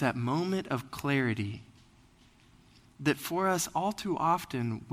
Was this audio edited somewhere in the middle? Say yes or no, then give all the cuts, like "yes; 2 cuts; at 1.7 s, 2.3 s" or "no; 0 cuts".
no; 0 cuts